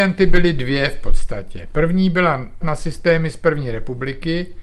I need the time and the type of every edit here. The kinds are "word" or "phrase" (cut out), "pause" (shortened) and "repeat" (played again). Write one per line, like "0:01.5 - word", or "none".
0:02.6 - word